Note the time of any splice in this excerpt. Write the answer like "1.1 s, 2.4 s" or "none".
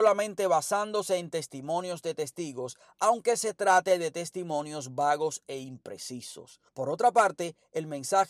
6.7 s